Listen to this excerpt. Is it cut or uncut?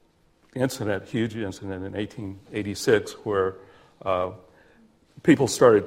uncut